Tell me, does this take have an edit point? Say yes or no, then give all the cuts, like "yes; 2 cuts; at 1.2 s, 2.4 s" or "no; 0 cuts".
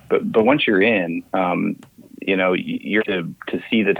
yes; 2 cuts; at 1.3 s, 3.0 s